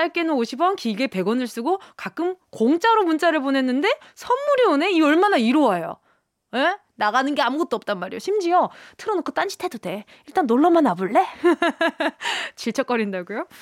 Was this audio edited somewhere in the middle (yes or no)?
no